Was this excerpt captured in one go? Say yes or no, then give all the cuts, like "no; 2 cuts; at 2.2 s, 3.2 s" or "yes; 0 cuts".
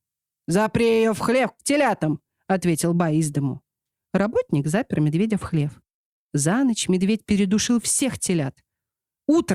yes; 0 cuts